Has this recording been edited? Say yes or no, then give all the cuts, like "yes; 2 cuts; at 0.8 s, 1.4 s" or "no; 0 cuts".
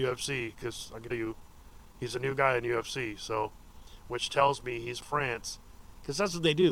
yes; 2 cuts; at 1.1 s, 5.0 s